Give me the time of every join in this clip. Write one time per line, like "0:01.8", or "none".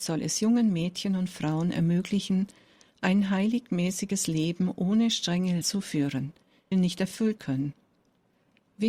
0:05.6
0:06.7
0:07.4